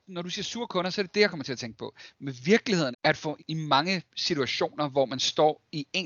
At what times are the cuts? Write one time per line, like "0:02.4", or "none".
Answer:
0:02.9
0:03.4